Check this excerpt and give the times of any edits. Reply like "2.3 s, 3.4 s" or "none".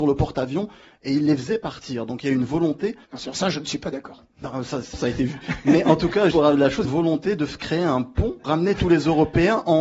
3.0 s, 4.9 s, 6.3 s, 6.8 s, 8.4 s